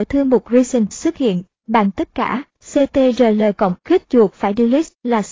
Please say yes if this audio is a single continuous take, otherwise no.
no